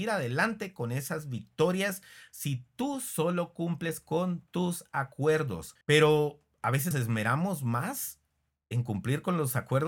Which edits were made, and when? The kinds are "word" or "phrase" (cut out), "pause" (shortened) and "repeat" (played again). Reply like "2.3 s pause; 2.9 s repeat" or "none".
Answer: 5.8 s pause; 6.9 s word